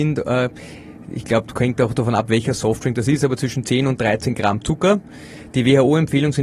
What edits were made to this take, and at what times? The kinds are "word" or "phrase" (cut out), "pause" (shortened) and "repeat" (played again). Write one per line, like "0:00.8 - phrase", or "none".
none